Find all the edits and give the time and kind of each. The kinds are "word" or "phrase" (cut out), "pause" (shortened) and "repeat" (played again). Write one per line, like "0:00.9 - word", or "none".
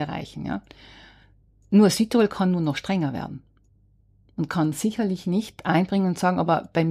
none